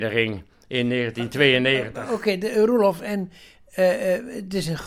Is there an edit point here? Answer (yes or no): no